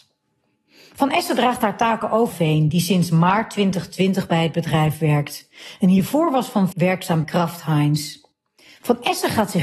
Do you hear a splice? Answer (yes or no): yes